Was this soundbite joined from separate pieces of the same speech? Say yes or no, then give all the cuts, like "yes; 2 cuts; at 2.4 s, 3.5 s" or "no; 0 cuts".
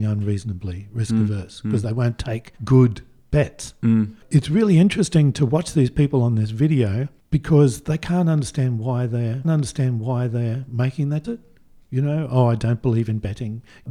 yes; 3 cuts; at 2.6 s, 9.4 s, 11.2 s